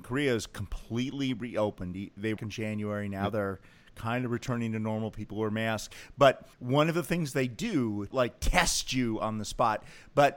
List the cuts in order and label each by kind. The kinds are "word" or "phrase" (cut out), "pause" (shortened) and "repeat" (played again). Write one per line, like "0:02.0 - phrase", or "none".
0:02.4 - phrase
0:06.5 - pause
0:08.1 - phrase